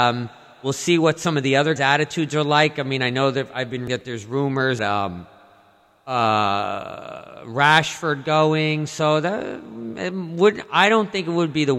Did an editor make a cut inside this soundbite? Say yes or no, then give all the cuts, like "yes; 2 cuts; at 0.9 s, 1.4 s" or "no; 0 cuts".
yes; 3 cuts; at 1.8 s, 3.9 s, 4.8 s